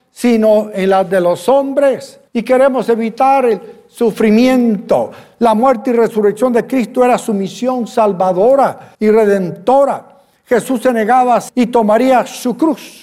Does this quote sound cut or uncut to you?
cut